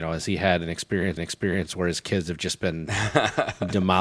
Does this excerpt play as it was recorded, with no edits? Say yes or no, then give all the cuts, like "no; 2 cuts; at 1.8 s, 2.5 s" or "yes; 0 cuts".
no; 1 cut; at 1.2 s